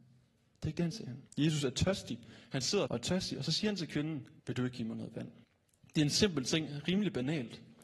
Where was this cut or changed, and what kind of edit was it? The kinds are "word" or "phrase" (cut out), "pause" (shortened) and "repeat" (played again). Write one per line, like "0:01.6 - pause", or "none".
0:00.9 - word
0:01.3 - pause
0:02.9 - phrase
0:04.4 - pause
0:05.4 - pause